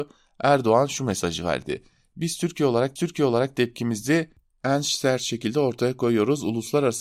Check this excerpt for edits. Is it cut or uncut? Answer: cut